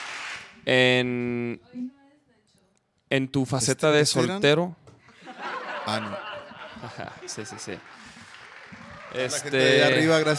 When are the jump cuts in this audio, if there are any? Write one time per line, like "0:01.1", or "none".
none